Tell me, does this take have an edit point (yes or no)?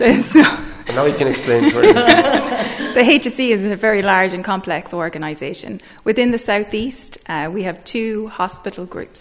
no